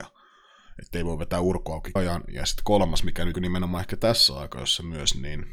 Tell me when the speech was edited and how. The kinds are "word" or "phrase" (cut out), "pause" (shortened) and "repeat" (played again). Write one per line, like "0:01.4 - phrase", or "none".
0:02.0 - word
0:03.3 - word

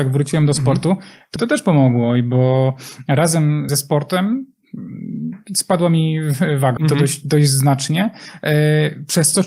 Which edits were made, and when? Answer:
0:01.4 - word
0:03.7 - word
0:06.8 - word

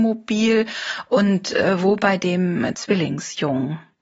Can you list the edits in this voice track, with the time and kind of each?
none

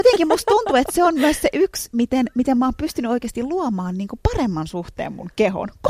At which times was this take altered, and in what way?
none

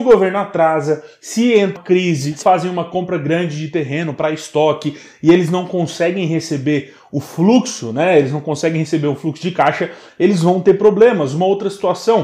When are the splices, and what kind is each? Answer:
0:01.8 - word
0:02.4 - word

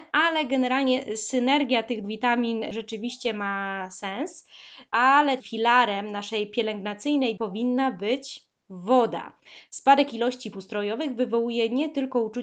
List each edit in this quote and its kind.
0:02.0 - word
0:05.4 - word
0:07.4 - word
0:10.5 - word

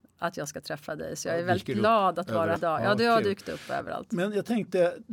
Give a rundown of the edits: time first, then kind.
0:02.6 - word

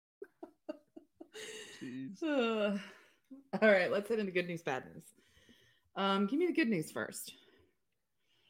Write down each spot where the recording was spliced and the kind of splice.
none

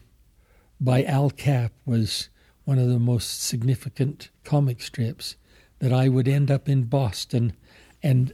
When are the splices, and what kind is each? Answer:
0:04.3 - pause

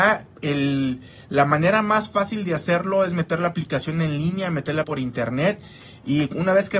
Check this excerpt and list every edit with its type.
0:04.8 - word

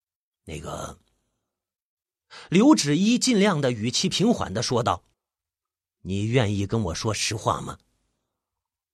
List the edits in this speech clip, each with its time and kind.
0:05.1 - pause

